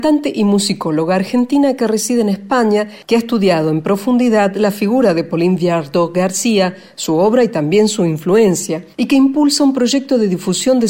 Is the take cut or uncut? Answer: cut